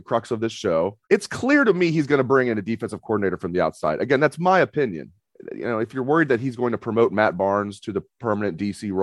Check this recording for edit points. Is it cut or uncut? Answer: cut